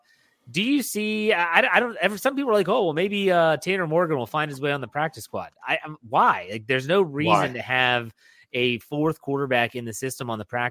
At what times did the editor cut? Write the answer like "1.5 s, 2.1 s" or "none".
none